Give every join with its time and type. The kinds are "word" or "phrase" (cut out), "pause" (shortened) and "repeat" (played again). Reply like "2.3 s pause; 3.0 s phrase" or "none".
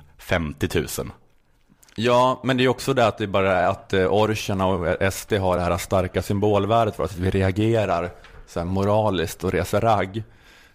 none